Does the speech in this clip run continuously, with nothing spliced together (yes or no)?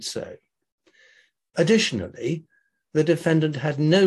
yes